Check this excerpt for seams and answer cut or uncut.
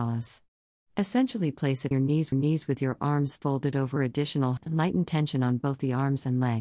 cut